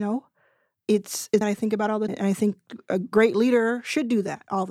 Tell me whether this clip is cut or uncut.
cut